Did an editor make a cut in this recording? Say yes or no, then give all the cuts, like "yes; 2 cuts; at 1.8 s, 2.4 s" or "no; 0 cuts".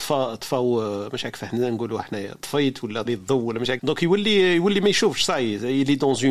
yes; 2 cuts; at 3.1 s, 3.8 s